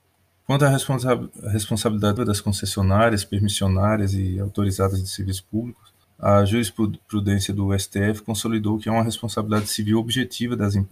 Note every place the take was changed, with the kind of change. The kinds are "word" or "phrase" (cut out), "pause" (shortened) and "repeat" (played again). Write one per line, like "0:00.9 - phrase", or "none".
0:02.2 - word
0:06.0 - pause